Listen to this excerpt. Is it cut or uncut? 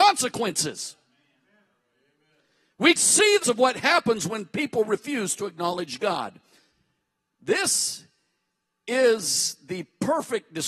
cut